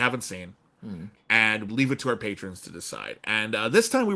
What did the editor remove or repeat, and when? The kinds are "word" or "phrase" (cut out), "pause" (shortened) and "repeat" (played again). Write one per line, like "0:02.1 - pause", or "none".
0:01.7 - word